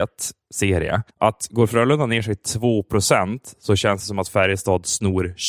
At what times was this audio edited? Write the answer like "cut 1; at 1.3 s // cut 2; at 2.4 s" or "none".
cut 1; at 1.1 s

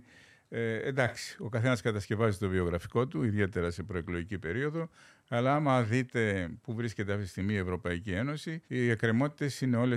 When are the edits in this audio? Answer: cut 1; at 8.6 s

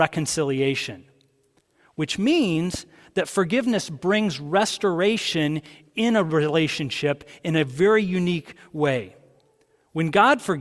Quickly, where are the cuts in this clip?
none

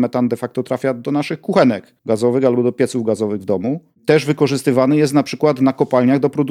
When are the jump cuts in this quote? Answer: cut 1; at 2.0 s

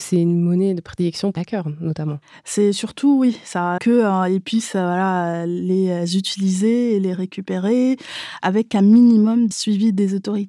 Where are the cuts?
cut 1; at 1.4 s // cut 2; at 3.8 s // cut 3; at 9.5 s

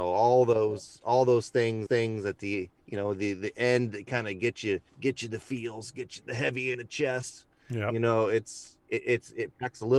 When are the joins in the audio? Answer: cut 1; at 1.9 s // cut 2; at 4.9 s // cut 3; at 6.2 s // cut 4; at 6.7 s // cut 5; at 8.8 s

